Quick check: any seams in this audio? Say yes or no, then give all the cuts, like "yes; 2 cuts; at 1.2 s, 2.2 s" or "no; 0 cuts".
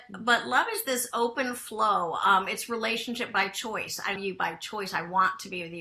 yes; 1 cut; at 4.2 s